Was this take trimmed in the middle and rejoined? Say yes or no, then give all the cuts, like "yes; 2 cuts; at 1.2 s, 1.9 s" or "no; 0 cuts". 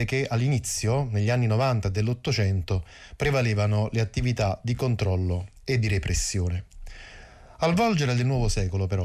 no; 0 cuts